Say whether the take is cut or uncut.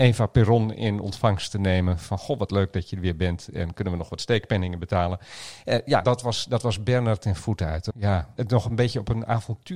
cut